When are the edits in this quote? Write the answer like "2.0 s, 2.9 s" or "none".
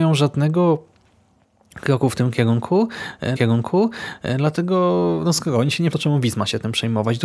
3.4 s, 5.9 s